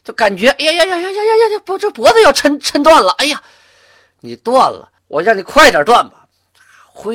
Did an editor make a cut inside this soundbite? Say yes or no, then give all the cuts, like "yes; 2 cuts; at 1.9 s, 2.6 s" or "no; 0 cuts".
yes; 1 cut; at 5.0 s